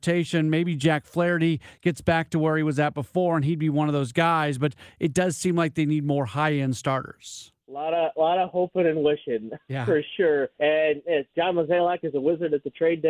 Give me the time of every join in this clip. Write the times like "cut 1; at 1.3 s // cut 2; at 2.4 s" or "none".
cut 1; at 7.6 s // cut 2; at 10.5 s